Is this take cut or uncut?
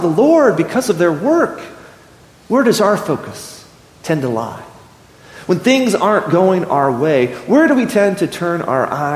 uncut